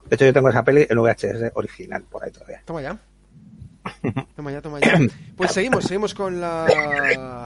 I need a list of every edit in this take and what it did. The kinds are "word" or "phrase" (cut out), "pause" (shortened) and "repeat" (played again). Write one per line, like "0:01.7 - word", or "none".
0:04.3 - pause